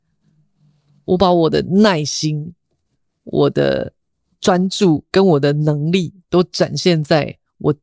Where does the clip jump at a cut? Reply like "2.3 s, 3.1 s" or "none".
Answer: 6.2 s